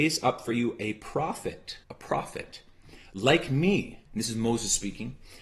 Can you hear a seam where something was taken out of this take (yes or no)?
yes